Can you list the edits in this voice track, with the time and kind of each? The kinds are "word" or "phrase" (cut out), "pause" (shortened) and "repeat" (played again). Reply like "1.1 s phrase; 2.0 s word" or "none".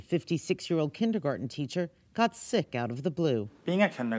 none